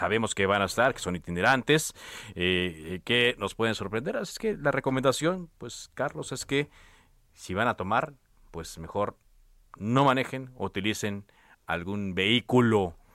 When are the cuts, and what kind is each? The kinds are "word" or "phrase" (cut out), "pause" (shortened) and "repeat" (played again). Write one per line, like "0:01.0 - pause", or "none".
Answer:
none